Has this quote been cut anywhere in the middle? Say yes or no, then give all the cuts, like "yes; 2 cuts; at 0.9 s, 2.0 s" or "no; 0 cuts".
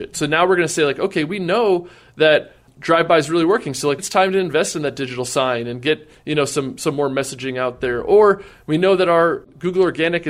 yes; 1 cut; at 4.0 s